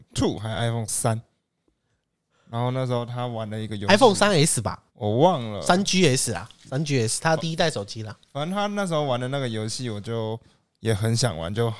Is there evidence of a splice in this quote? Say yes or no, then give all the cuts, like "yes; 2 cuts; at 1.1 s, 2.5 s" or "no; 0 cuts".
yes; 1 cut; at 4.9 s